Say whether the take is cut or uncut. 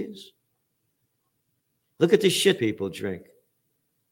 cut